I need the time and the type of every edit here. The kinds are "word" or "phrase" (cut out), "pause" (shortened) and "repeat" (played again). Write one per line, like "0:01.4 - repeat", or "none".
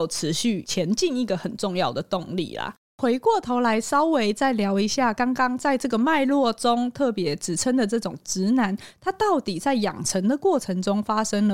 0:02.9 - pause